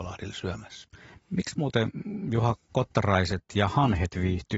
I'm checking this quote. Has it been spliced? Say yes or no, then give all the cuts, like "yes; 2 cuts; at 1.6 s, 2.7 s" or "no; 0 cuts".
no; 0 cuts